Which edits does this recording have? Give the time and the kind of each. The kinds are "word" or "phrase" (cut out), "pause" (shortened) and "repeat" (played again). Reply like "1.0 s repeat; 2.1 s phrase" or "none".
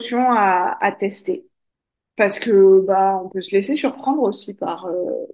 1.7 s pause